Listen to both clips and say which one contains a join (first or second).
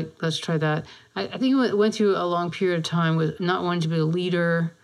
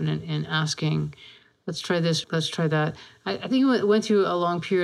second